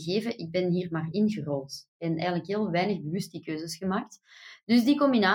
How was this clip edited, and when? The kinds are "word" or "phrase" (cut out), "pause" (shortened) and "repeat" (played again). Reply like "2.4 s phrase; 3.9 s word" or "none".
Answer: none